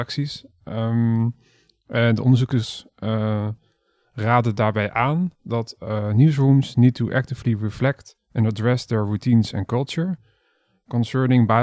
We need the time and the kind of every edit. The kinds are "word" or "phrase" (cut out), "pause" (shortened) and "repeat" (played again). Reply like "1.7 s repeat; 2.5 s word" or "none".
none